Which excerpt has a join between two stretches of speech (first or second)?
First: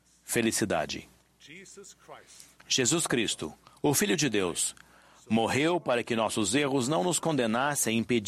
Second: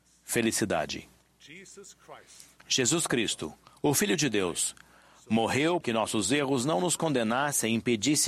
second